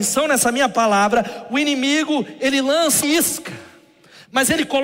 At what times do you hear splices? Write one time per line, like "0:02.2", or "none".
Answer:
0:03.0